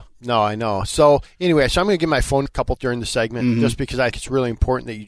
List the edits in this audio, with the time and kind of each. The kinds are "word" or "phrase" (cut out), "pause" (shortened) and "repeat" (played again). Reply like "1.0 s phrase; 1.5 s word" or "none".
2.5 s word; 2.8 s word; 4.1 s word